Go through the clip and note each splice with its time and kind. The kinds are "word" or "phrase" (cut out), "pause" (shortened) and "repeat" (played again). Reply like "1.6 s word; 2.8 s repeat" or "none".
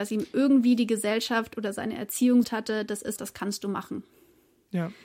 2.4 s word; 3.2 s word